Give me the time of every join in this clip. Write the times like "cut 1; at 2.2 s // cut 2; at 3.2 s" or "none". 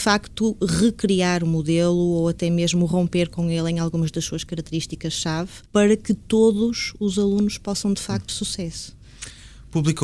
cut 1; at 5.6 s // cut 2; at 8.3 s